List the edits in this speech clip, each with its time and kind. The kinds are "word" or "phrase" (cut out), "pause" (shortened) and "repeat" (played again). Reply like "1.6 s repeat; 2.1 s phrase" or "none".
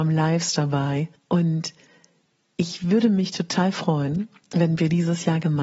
none